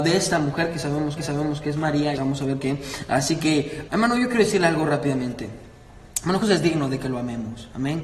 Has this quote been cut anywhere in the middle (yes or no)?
yes